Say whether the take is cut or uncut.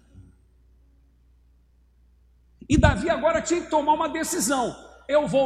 uncut